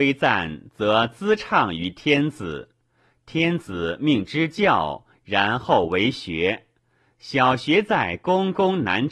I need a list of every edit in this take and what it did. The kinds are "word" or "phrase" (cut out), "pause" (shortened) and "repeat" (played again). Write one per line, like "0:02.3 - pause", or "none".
none

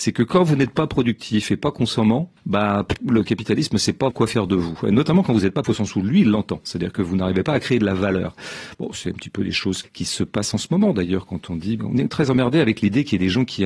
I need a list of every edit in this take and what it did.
0:02.4 - pause
0:04.1 - word
0:05.6 - word
0:09.8 - word
0:11.8 - word

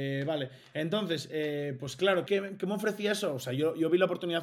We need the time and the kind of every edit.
0:02.3 - word

